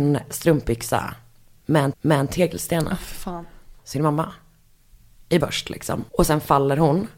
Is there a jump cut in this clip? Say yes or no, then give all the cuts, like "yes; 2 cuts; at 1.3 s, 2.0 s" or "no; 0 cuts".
yes; 4 cuts; at 1.9 s, 3.8 s, 5.4 s, 6.1 s